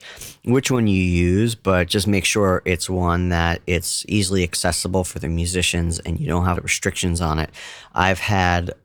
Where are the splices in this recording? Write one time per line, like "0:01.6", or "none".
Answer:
0:06.6